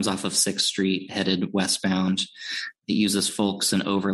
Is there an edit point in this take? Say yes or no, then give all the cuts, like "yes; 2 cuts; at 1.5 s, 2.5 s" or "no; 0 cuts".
yes; 1 cut; at 2.8 s